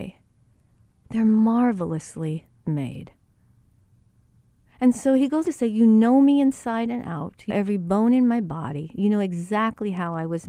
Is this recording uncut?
no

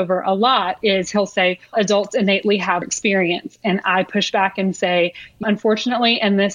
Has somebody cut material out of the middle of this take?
yes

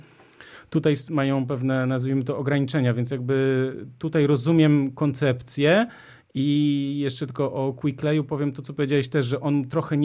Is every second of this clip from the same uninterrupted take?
yes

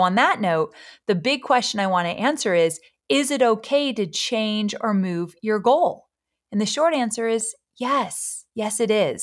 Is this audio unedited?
yes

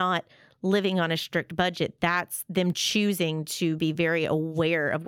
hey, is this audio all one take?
yes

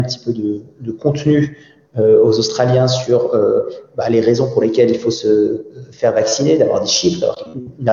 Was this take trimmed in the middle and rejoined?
no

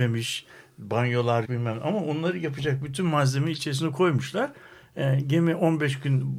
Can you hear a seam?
yes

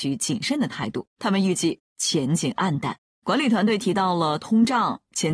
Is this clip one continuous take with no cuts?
no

